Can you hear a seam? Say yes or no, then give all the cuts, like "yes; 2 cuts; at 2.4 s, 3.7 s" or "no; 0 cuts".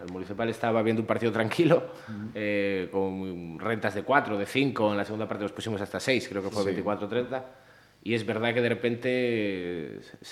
no; 0 cuts